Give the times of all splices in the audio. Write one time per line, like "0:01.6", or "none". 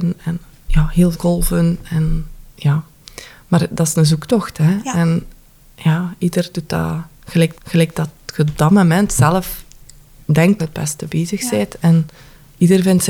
0:01.1
0:02.5
0:07.5
0:10.6
0:12.2